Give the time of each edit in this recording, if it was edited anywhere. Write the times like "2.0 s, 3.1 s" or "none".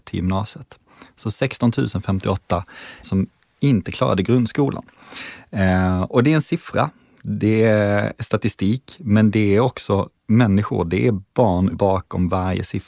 3.0 s, 11.7 s